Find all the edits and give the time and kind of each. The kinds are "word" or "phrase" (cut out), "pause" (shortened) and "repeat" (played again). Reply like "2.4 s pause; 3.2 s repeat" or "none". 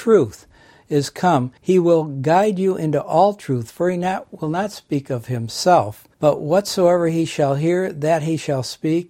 1.6 s pause; 6.1 s pause

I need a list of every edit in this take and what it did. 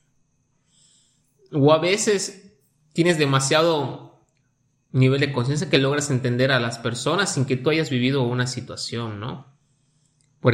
none

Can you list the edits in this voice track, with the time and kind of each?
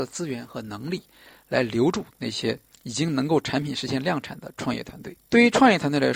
2.7 s pause; 5.2 s pause

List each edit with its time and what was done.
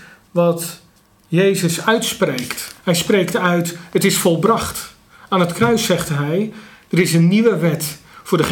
2.8 s pause

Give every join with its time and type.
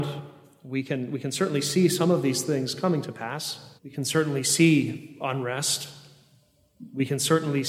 3.8 s pause

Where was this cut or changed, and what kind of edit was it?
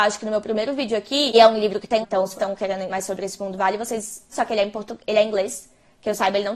1.3 s word; 2.0 s word; 2.3 s word; 2.9 s word; 4.3 s word

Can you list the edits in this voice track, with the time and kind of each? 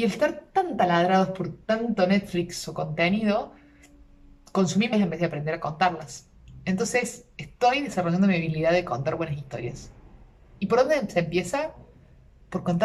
4.9 s word

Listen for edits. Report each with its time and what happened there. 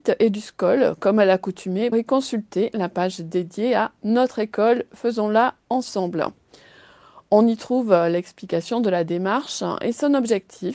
1.9 s word

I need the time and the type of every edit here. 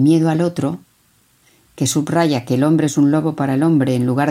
none

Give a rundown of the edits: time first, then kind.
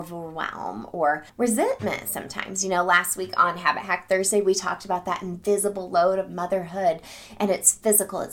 1.3 s pause

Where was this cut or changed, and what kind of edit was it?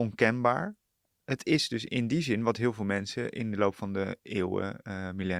1.9 s word

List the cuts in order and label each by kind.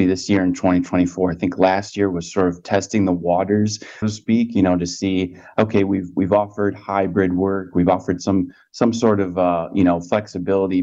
4.0 s word

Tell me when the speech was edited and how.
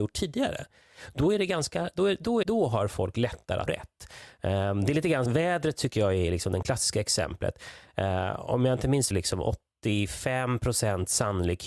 2.4 s word; 3.7 s word; 5.3 s word; 6.6 s word; 9.1 s phrase

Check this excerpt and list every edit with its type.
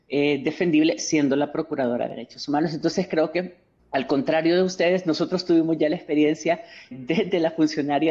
3.8 s pause; 6.9 s word

